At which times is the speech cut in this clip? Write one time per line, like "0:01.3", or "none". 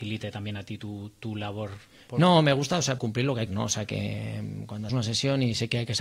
0:03.0
0:03.5
0:04.9